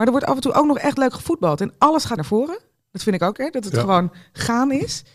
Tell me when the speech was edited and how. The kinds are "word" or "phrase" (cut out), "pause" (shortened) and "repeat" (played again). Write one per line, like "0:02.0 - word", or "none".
0:02.2 - word
0:03.3 - word

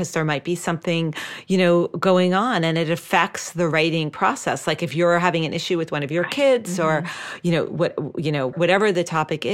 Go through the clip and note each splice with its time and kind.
0:08.5 - word

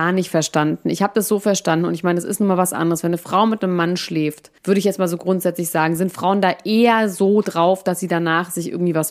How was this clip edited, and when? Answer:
0:04.6 - pause

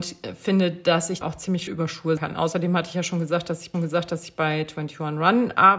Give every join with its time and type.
0:01.2 - word
0:01.7 - word
0:02.2 - word
0:03.7 - repeat

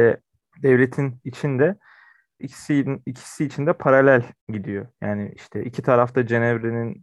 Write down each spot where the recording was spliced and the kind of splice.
0:01.2 - word
0:02.4 - phrase
0:04.4 - pause

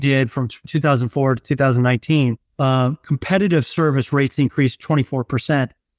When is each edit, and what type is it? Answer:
0:02.5 - pause

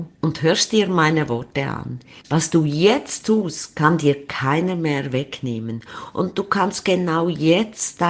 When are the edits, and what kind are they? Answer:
none

